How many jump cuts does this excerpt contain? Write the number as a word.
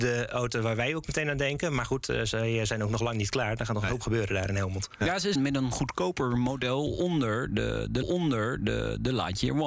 two